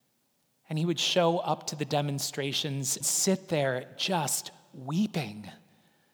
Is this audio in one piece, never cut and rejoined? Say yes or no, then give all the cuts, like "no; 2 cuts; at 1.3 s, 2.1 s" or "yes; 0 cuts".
no; 1 cut; at 3.0 s